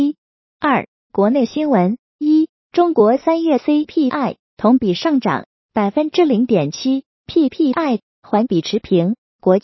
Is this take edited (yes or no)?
no